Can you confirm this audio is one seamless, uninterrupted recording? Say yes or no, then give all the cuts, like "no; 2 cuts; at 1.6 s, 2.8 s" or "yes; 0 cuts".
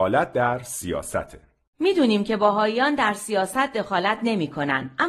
yes; 0 cuts